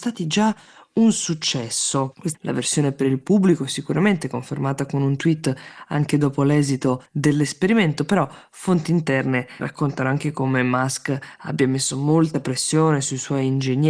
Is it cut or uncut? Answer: cut